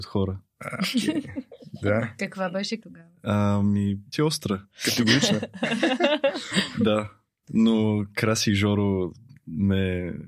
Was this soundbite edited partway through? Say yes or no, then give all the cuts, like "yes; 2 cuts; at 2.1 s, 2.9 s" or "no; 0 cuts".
yes; 2 cuts; at 2.8 s, 4.1 s